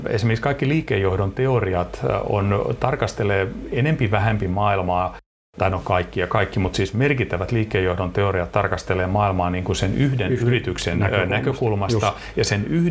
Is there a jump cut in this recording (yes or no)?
no